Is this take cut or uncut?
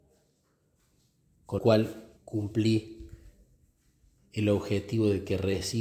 cut